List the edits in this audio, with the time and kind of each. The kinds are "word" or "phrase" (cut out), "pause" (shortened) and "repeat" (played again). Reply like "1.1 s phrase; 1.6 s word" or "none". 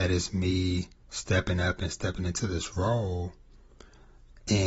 1.0 s pause